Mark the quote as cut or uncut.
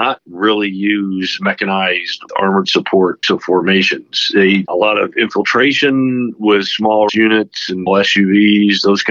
cut